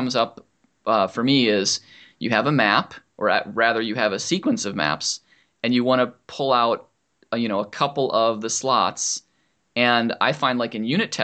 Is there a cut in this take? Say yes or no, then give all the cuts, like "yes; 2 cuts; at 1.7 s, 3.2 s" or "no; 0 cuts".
no; 0 cuts